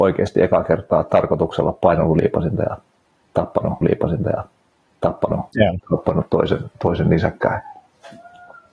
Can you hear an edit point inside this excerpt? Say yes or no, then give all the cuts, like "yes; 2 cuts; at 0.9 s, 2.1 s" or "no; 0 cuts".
yes; 1 cut; at 3.8 s